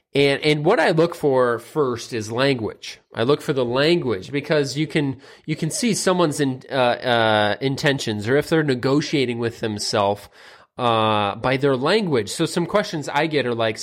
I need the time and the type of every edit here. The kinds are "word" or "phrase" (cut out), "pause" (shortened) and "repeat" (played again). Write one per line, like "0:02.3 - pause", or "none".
none